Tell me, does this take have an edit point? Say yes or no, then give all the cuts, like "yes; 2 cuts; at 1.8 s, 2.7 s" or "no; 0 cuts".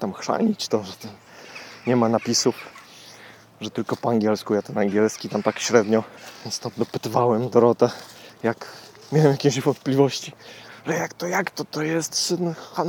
no; 0 cuts